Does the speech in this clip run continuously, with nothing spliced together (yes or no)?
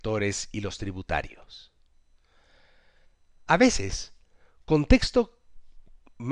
yes